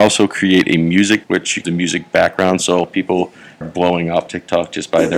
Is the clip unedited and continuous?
no; 5 cuts; at 1.2 s, 1.6 s, 2.8 s, 3.6 s, 4.3 s

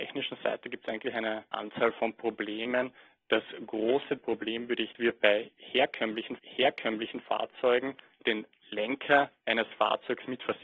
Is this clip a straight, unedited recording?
no; 4 cuts; at 1.5 s, 4.2 s, 4.9 s, 6.4 s

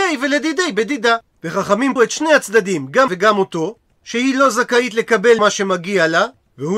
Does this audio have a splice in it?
yes; 3 cuts; at 2.0 s, 3.1 s, 5.4 s

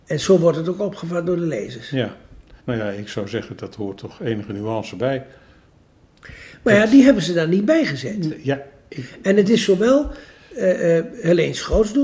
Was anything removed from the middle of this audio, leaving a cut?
yes; 1 cut; at 2.6 s

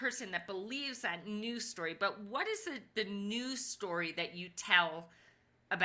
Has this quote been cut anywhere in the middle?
no; 0 cuts

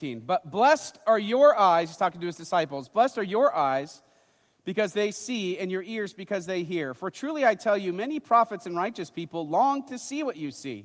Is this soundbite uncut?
yes; 0 cuts

